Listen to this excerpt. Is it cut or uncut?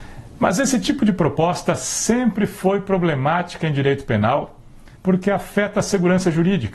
cut